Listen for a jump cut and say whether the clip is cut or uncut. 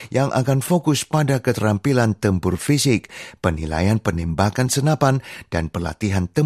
uncut